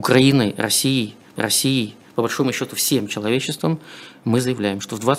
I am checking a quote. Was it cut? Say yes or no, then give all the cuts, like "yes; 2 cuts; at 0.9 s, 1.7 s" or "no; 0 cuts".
yes; 1 cut; at 1.4 s